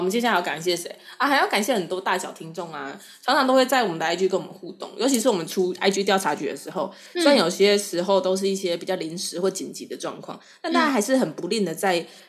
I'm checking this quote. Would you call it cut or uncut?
uncut